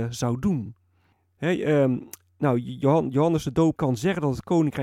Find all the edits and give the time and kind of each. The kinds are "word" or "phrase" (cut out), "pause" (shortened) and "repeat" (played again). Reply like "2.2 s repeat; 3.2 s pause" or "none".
1.1 s pause; 3.8 s word